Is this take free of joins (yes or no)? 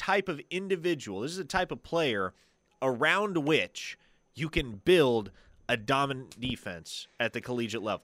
yes